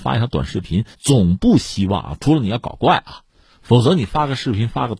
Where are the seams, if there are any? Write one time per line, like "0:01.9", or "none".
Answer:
0:00.9